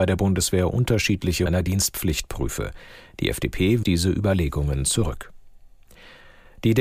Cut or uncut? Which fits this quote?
cut